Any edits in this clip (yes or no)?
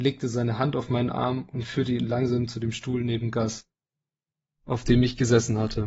no